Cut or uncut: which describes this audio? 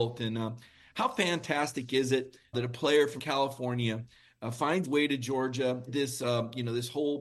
cut